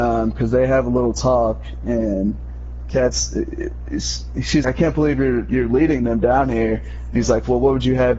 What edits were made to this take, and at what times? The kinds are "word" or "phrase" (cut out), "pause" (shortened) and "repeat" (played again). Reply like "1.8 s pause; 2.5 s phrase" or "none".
4.6 s word